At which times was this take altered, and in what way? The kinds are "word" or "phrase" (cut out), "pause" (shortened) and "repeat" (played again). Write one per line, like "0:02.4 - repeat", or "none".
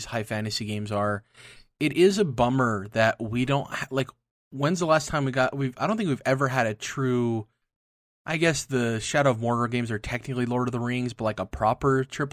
none